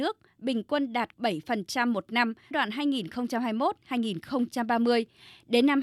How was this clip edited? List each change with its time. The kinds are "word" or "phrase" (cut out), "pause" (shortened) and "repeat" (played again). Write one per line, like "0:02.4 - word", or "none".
0:01.1 - word
0:02.5 - word